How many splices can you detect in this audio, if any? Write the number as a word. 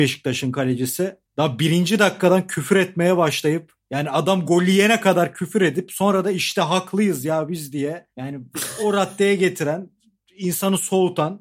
one